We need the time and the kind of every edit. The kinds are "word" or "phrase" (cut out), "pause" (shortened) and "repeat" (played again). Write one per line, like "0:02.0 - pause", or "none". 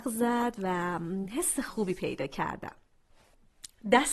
none